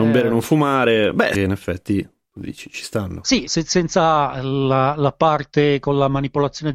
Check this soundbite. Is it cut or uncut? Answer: cut